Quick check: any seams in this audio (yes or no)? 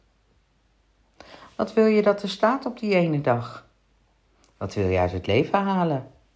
no